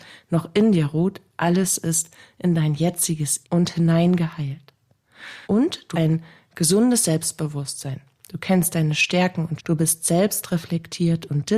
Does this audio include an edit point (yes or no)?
yes